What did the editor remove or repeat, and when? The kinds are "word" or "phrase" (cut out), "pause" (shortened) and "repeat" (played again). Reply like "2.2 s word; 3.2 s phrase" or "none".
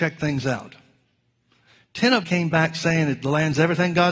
2.2 s word